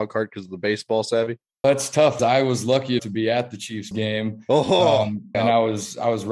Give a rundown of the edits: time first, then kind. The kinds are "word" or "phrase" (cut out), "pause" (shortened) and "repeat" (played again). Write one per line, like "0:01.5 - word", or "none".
0:01.6 - word
0:02.2 - word
0:03.0 - word
0:03.9 - word
0:05.3 - word